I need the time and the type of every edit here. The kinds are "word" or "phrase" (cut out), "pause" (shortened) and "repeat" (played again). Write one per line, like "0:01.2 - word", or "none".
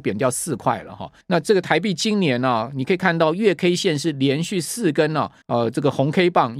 0:01.2 - pause
0:05.4 - pause